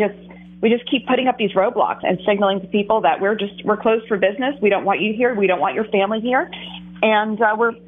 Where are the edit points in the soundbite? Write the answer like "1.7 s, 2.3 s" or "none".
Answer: 2.0 s